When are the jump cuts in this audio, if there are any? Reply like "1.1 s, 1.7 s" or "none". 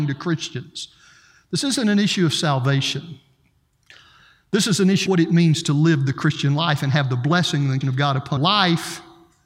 5.1 s, 7.8 s, 8.4 s